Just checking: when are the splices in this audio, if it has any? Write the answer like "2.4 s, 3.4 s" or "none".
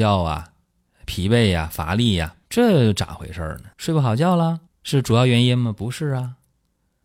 2.4 s, 3.7 s, 4.7 s